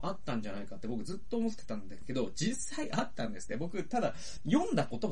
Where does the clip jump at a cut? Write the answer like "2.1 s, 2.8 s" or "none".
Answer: none